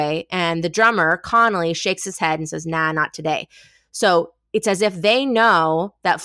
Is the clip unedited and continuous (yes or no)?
yes